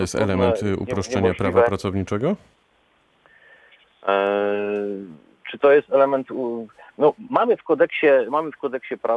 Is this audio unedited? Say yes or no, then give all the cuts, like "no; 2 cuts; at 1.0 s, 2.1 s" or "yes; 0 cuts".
no; 1 cut; at 7.3 s